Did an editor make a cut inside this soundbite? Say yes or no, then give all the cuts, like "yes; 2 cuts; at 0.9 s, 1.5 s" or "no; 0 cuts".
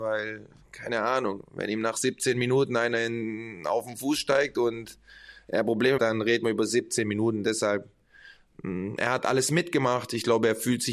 yes; 1 cut; at 6.0 s